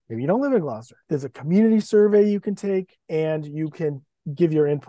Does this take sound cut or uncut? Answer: cut